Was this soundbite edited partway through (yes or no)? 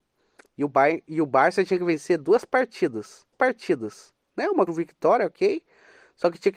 yes